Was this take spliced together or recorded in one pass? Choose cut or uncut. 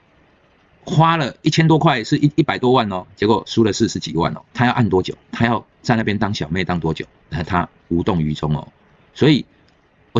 cut